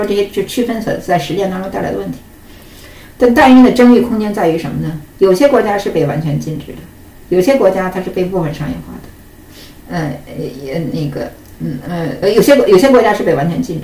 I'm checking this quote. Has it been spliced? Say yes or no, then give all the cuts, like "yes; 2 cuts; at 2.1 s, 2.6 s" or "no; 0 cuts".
yes; 1 cut; at 12.2 s